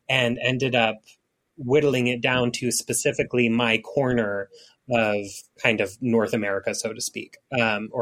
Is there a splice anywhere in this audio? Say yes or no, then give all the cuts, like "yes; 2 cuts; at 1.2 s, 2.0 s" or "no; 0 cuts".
no; 0 cuts